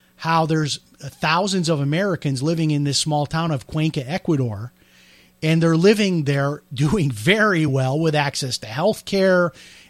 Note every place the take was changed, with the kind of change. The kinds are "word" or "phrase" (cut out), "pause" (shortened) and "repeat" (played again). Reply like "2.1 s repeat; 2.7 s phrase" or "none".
none